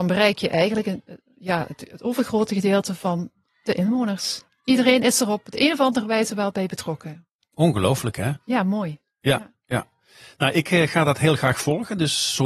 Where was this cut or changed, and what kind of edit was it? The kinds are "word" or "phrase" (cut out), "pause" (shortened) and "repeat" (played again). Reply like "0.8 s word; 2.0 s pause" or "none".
none